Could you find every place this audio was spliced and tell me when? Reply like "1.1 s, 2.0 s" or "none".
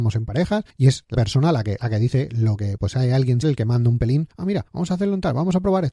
1.1 s, 2.8 s, 3.4 s